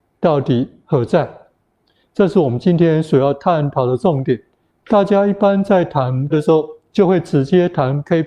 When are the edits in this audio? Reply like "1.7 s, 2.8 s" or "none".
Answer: 4.7 s, 6.3 s